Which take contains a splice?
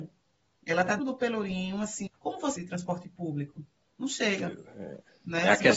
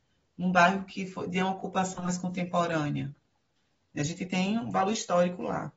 first; 4 cuts; at 1.0 s, 2.1 s, 2.6 s, 3.8 s

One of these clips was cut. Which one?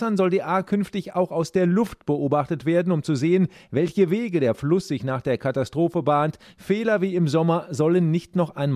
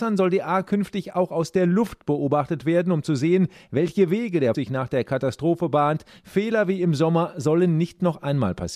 second; 1 cut; at 4.5 s

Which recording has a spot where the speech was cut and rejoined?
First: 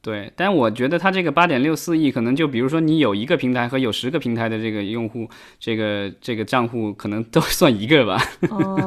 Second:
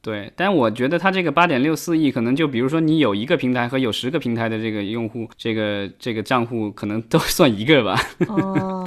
second; 1 cut; at 5.3 s

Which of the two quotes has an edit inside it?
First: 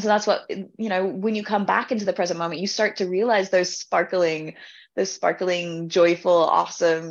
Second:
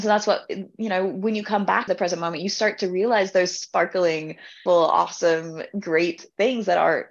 second; 2 cuts; at 1.9 s, 4.7 s

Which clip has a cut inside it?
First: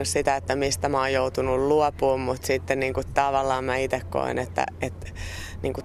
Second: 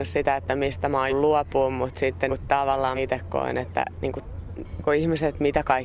second; 5 cuts; at 1.1 s, 2.3 s, 3.0 s, 4.0 s, 4.8 s

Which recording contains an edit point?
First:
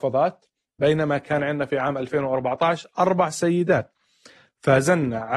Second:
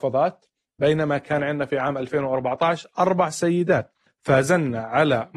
second; 1 cut; at 4.1 s

